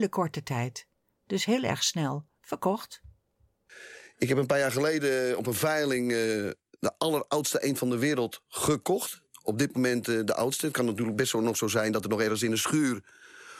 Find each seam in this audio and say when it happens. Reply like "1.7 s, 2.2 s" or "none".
none